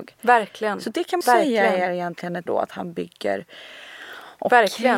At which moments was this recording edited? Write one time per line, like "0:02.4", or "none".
0:01.2
0:02.5